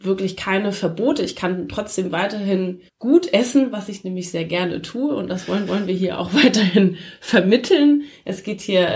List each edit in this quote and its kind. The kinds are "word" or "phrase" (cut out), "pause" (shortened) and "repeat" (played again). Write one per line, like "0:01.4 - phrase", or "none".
0:02.9 - pause
0:05.7 - repeat